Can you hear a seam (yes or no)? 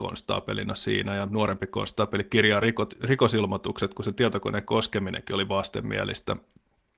no